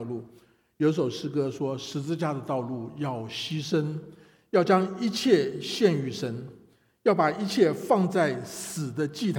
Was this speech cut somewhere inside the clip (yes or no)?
no